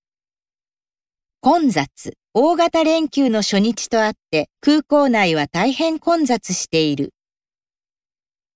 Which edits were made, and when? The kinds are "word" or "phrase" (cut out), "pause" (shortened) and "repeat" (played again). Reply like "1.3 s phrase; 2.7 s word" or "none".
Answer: 2.2 s pause; 4.5 s pause